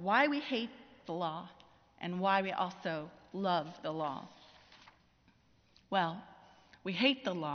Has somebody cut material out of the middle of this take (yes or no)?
no